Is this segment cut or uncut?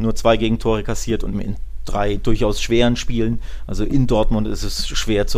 cut